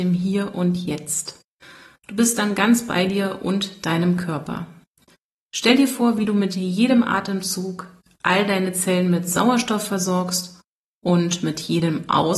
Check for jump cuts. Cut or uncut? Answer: uncut